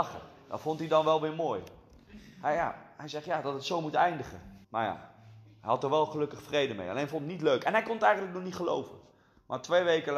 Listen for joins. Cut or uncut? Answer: cut